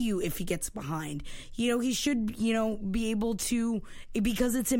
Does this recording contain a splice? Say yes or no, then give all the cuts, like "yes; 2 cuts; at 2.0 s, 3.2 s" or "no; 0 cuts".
no; 0 cuts